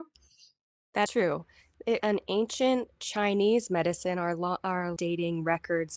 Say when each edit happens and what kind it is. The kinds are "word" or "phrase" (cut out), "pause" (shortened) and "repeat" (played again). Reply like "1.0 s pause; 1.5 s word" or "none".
1.1 s word; 2.0 s word; 5.0 s word